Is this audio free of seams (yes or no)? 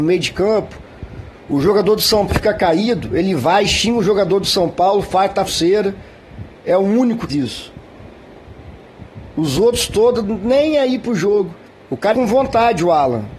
no